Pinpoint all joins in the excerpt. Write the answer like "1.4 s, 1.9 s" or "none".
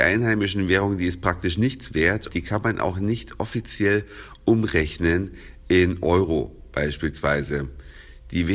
2.3 s